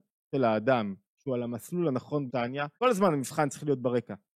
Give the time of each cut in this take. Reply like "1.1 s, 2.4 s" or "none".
2.3 s, 2.7 s